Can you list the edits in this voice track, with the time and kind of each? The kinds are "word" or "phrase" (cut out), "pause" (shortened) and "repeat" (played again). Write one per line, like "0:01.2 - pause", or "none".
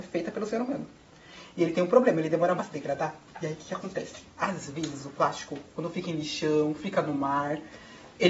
0:02.6 - word